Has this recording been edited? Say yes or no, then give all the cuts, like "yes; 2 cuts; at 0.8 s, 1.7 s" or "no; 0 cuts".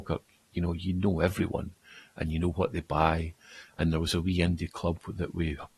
no; 0 cuts